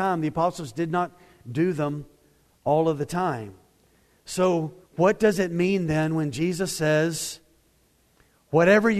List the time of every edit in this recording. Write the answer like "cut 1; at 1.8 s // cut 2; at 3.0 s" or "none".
cut 1; at 4.8 s